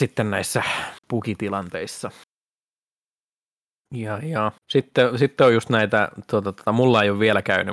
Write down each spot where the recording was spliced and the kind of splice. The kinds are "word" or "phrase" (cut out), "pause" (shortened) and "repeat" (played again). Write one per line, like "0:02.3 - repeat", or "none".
0:01.0 - pause
0:04.6 - pause